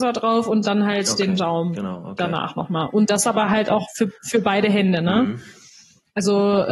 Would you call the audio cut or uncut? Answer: uncut